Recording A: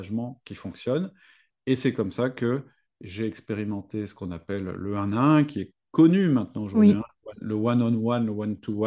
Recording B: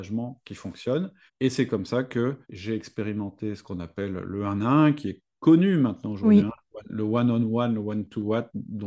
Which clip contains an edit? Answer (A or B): B